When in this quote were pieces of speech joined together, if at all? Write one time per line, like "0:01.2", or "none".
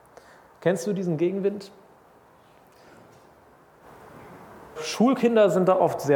0:04.8